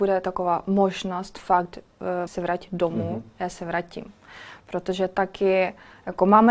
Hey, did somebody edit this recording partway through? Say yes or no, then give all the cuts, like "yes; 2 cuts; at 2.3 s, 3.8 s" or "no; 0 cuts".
yes; 1 cut; at 2.3 s